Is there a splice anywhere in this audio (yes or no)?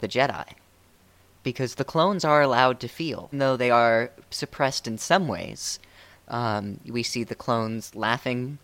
yes